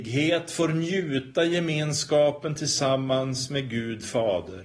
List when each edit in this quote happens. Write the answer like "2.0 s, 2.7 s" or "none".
none